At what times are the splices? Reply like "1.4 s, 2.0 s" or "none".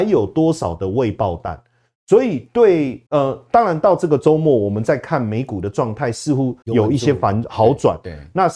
3.1 s, 6.6 s